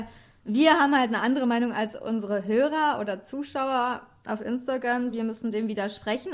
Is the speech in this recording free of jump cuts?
no; 1 cut; at 5.1 s

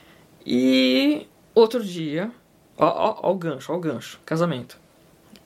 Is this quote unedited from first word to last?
yes; 0 cuts

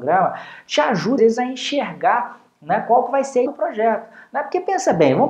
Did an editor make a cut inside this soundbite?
yes; 2 cuts; at 1.2 s, 3.5 s

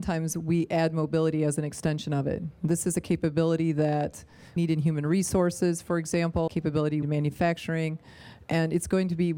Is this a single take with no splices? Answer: no; 3 cuts; at 4.6 s, 6.5 s, 7.0 s

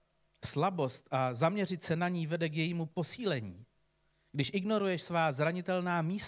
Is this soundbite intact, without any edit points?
yes; 0 cuts

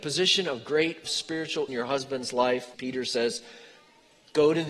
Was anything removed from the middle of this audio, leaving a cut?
yes; 3 cuts; at 1.0 s, 1.7 s, 2.7 s

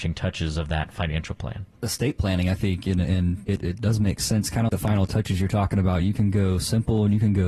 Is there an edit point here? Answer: yes; 3 cuts; at 1.7 s, 3.5 s, 4.7 s

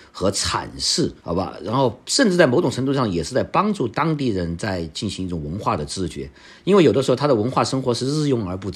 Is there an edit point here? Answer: yes; 1 cut; at 1.2 s

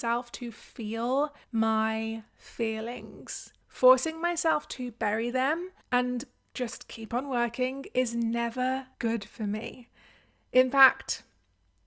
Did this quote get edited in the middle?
yes; 4 cuts; at 1.4 s, 3.6 s, 5.8 s, 8.9 s

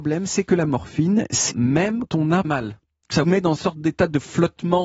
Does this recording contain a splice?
yes; 5 cuts; at 1.5 s, 2.1 s, 2.4 s, 3.2 s, 3.6 s

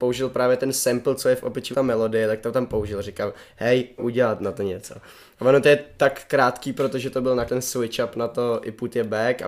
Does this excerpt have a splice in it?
yes; 3 cuts; at 1.7 s, 4.0 s, 7.5 s

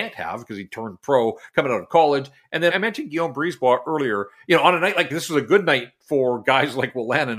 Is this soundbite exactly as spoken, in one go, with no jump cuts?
no; 2 cuts; at 2.7 s, 5.1 s

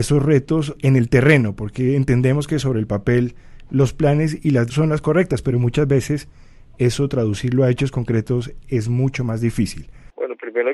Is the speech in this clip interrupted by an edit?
yes; 1 cut; at 4.7 s

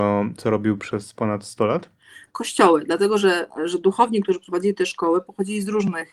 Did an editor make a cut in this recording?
no; 0 cuts

